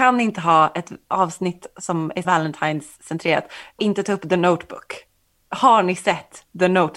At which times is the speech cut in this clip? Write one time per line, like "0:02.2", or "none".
0:01.0
0:02.2
0:03.8

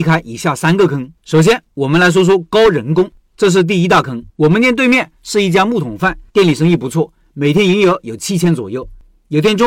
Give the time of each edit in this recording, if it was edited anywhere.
0:01.2
0:04.3
0:06.3

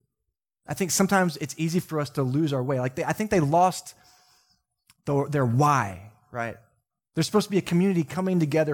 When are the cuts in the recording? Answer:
none

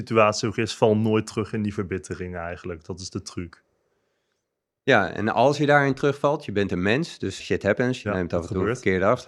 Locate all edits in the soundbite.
0:07.4

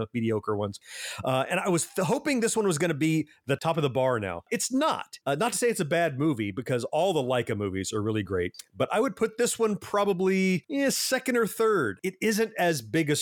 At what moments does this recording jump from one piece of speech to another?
none

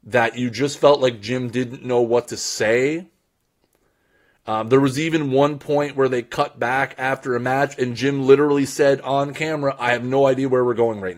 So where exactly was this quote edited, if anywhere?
none

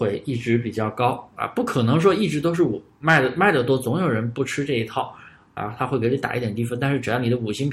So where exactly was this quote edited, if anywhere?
none

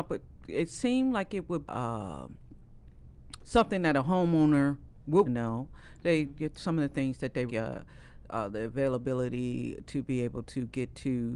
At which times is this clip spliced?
0:01.7
0:05.3
0:07.5

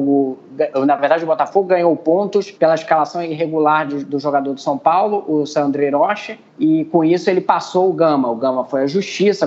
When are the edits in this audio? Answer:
0:02.5
0:06.5

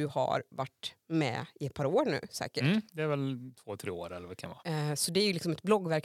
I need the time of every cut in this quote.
0:04.6

